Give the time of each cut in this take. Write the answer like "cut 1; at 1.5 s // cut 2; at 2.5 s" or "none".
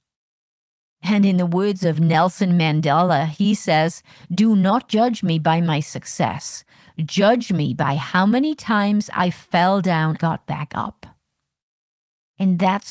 cut 1; at 10.2 s